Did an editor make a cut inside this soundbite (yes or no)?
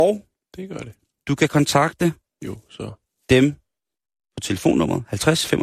no